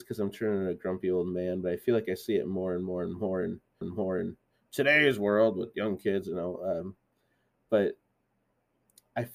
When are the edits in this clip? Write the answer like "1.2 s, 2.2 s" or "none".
3.8 s